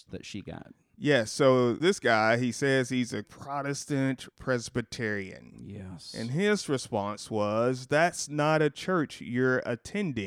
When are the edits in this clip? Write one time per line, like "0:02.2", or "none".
0:01.8
0:03.2
0:04.3